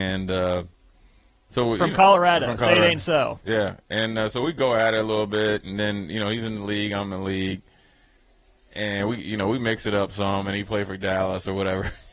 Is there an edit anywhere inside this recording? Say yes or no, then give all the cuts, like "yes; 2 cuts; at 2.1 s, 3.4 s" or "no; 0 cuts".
no; 0 cuts